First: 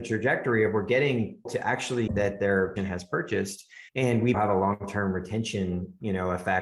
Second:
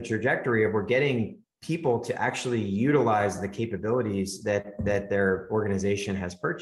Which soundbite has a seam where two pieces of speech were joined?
first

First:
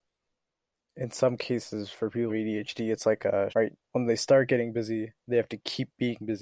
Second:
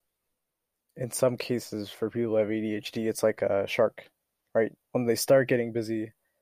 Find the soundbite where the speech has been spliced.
first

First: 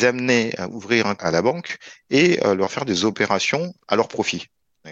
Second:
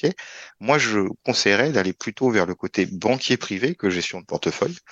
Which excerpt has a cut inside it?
first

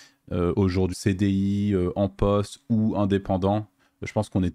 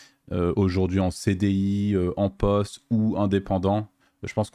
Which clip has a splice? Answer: first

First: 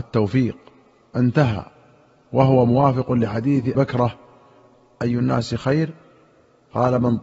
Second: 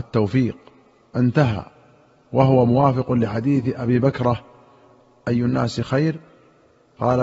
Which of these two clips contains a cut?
first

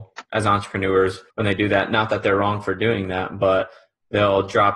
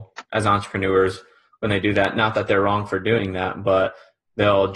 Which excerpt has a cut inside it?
first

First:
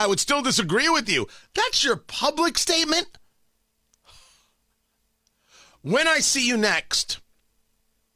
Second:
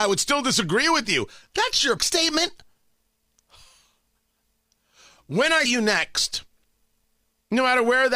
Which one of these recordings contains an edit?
second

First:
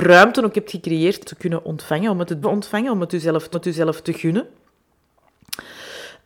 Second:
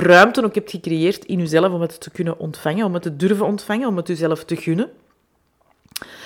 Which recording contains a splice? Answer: first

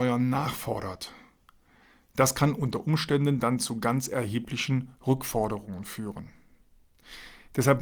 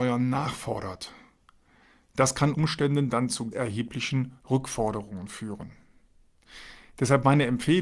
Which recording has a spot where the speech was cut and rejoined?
second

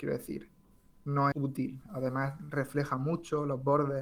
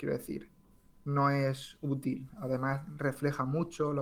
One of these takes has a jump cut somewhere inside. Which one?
first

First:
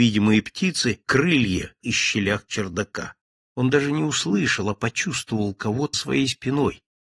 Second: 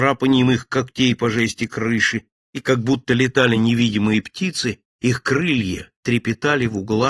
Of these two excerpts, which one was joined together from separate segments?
first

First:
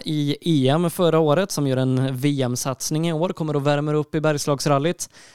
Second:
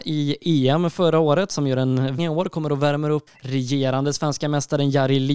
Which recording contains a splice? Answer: second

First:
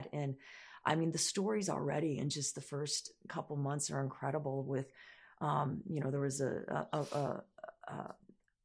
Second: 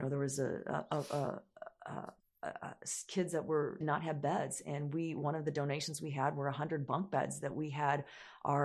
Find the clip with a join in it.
second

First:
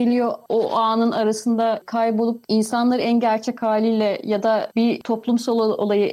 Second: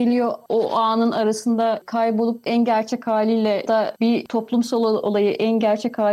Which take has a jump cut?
second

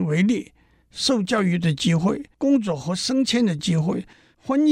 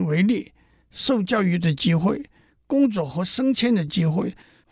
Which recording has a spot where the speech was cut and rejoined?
first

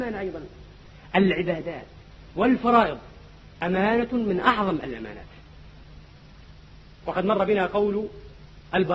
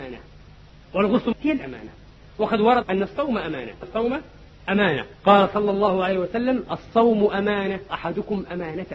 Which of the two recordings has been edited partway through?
second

